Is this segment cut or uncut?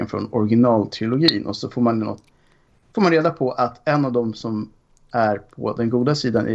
uncut